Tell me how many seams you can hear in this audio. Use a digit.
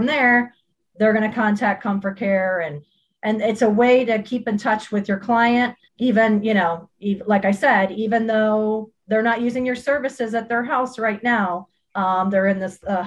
0